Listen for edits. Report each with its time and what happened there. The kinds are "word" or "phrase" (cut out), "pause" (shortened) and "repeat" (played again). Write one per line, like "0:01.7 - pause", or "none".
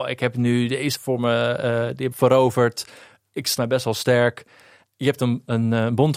0:01.0 - word
0:02.1 - word
0:03.6 - word